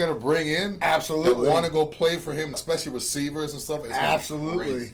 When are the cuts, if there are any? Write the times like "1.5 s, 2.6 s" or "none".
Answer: 2.5 s